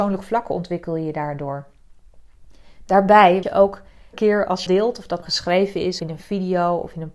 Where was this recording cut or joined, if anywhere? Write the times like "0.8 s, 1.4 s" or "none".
3.4 s, 4.1 s, 4.7 s, 5.2 s, 6.0 s